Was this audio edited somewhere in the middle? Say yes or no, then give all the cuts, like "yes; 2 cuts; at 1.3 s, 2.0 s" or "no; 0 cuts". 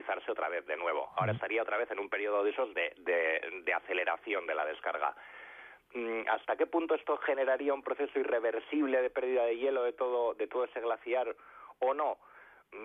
no; 0 cuts